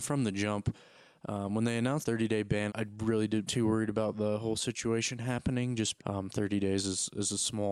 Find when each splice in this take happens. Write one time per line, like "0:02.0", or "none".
0:02.0
0:02.7
0:03.5
0:06.0